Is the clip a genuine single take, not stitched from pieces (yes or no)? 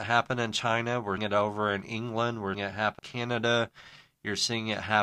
no